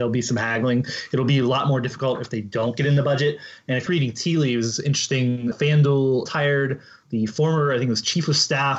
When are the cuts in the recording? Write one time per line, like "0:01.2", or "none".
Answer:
0:03.9
0:05.5
0:06.3